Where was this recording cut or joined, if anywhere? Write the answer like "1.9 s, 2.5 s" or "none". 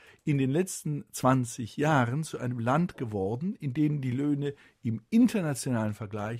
none

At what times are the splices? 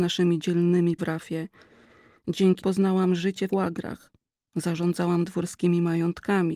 1.0 s, 2.6 s, 3.5 s

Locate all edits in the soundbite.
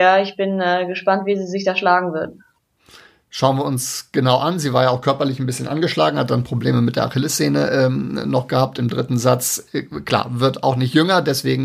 none

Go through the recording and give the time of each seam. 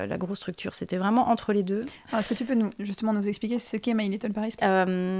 none

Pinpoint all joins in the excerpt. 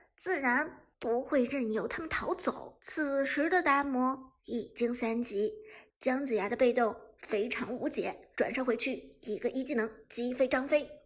2.8 s, 4.4 s, 8.3 s

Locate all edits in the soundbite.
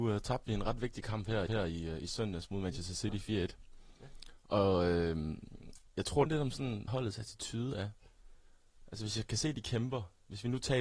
1.5 s, 5.9 s, 6.3 s, 6.9 s

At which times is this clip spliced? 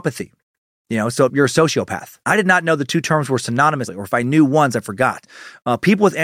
1.3 s, 2.2 s, 3.9 s

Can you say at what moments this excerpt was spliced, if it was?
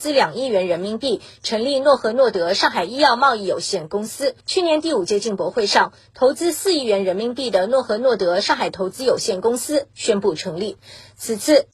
4.4 s

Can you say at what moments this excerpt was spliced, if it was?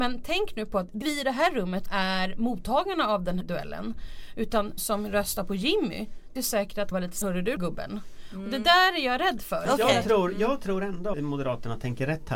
1.0 s, 1.9 s, 3.4 s, 4.8 s, 6.4 s, 6.9 s, 7.2 s, 7.6 s, 11.1 s

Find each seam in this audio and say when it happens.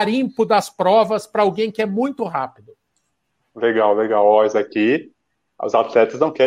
none

